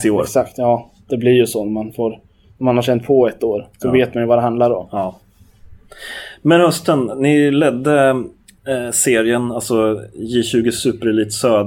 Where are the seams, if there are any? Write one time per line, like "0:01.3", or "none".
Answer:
0:08.5